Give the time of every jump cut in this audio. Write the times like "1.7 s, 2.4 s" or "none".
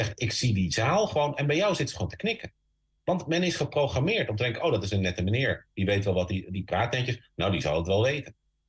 none